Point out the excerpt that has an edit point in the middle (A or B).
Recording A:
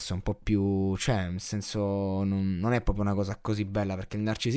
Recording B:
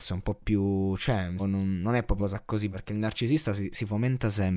B